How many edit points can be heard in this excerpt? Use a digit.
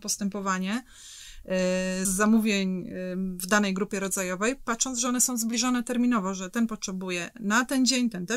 1